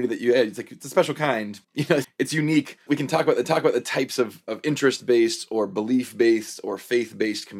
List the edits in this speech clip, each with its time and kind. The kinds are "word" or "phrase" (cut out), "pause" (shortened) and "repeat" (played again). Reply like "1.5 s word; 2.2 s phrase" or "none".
1.6 s pause; 2.0 s word; 2.9 s phrase; 3.4 s repeat